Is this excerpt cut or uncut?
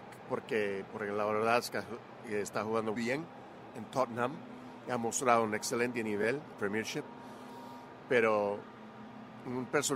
cut